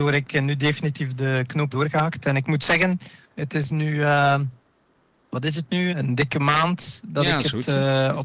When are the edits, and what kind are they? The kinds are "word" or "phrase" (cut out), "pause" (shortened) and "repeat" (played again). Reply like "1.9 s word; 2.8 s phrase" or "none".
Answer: 1.7 s word; 3.2 s pause; 5.9 s word